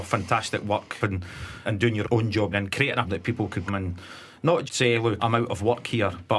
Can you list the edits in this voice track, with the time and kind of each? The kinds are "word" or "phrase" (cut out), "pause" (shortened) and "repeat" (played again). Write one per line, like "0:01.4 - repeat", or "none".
0:01.0 - word
0:01.6 - word
0:02.0 - word
0:02.5 - word
0:03.0 - word
0:03.7 - word
0:04.7 - word
0:05.2 - word

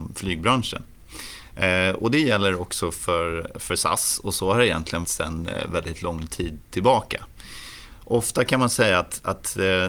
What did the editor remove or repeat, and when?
0:05.0 - word

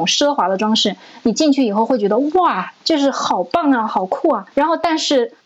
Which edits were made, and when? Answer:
0:04.5 - pause

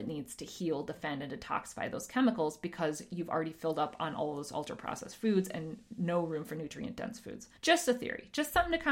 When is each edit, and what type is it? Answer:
0:07.6 - pause

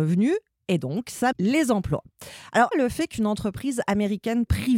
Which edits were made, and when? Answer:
0:01.3 - word
0:02.7 - word

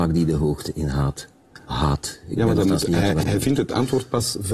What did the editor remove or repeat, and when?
0:03.2 - word

